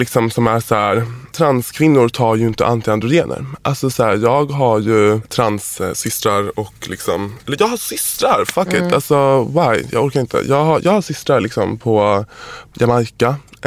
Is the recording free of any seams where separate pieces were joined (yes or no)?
no